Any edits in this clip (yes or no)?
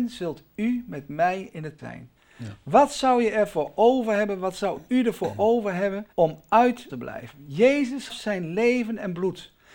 yes